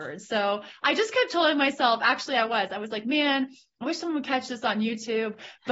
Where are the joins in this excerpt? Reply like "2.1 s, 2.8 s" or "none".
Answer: none